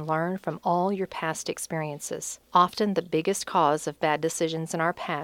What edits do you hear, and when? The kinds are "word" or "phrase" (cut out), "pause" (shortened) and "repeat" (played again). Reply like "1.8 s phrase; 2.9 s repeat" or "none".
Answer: 2.4 s pause